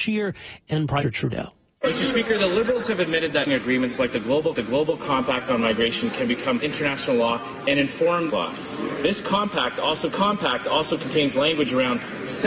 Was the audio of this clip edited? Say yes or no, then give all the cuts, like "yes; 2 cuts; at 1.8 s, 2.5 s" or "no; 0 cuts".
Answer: yes; 6 cuts; at 1.0 s, 3.5 s, 4.6 s, 6.6 s, 8.3 s, 10.1 s